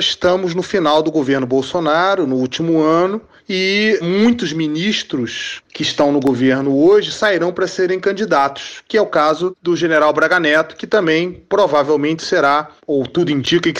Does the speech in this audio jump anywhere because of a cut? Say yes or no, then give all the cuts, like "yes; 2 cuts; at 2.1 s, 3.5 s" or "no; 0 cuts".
no; 0 cuts